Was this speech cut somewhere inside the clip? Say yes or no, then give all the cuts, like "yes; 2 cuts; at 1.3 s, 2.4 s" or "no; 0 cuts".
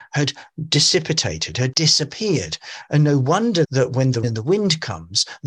yes; 3 cuts; at 1.7 s, 3.6 s, 4.2 s